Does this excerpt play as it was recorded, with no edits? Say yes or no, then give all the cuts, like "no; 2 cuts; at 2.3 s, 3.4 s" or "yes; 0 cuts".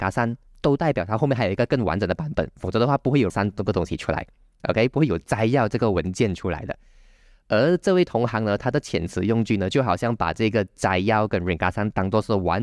no; 1 cut; at 3.3 s